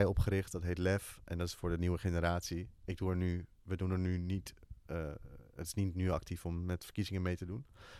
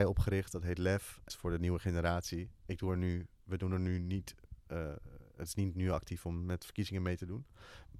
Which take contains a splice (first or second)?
second